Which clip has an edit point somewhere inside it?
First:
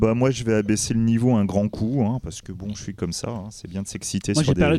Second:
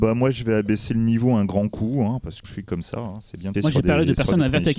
second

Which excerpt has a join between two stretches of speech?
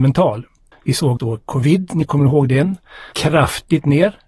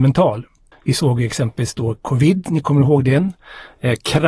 first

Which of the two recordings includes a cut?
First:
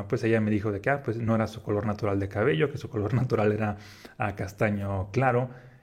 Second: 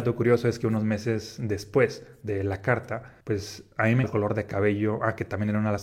second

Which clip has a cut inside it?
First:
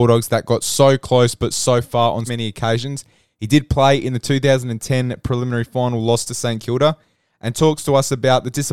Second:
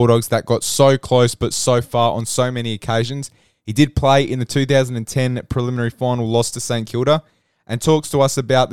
first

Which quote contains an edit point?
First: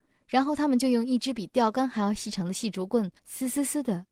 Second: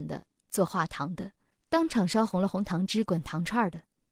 first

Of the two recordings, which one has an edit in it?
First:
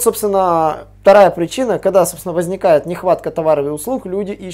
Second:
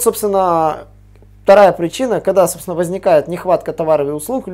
first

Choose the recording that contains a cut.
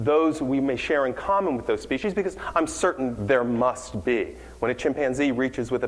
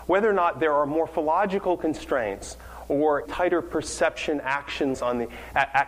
second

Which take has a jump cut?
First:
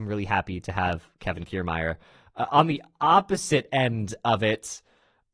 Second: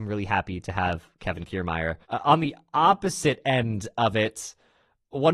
second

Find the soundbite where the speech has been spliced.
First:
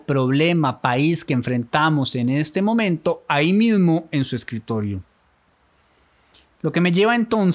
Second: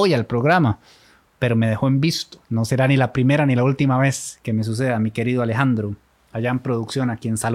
second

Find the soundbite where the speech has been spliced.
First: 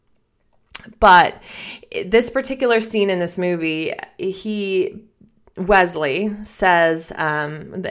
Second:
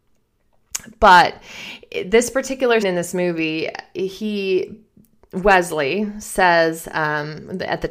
second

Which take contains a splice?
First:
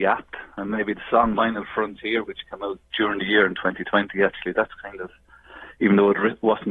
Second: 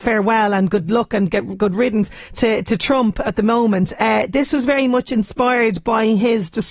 first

